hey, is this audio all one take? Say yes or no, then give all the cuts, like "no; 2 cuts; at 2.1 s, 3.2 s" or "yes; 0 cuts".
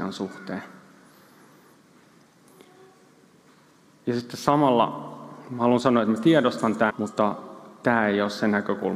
no; 1 cut; at 6.9 s